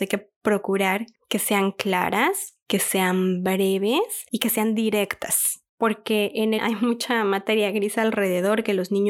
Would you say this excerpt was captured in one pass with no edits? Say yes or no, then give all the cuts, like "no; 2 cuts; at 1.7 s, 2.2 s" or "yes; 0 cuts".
no; 2 cuts; at 5.7 s, 6.6 s